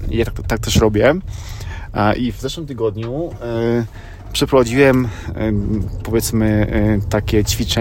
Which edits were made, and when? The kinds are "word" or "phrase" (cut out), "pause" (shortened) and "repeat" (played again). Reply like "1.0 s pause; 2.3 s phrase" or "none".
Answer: none